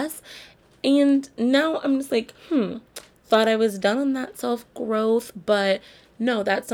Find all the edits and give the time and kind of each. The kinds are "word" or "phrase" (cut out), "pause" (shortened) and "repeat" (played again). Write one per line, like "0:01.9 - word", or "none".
0:02.4 - pause